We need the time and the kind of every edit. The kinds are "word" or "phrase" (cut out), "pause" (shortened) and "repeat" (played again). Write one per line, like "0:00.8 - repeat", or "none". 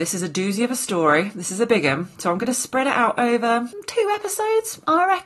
none